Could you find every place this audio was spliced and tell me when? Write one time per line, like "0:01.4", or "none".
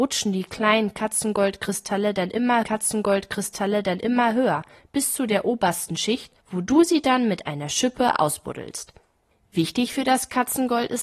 0:02.6
0:06.4